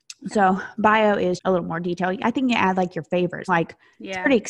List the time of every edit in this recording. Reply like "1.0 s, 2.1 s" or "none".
1.4 s, 3.5 s